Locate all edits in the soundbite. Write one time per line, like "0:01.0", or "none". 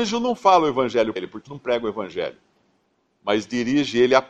0:01.2
0:01.5